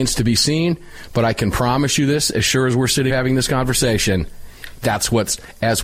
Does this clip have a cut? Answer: yes; 1 cut; at 3.1 s

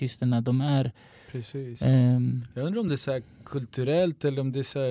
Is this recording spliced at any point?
no; 0 cuts

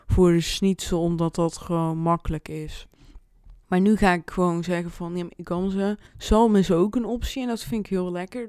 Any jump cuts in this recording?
yes; 2 cuts; at 3.6 s, 6.1 s

